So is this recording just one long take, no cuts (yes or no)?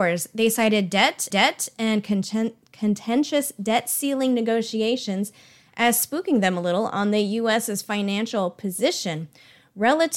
no